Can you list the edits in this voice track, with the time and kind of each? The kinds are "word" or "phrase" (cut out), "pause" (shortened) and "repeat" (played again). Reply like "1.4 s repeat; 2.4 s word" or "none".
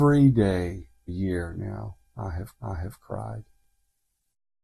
1.1 s phrase; 2.5 s repeat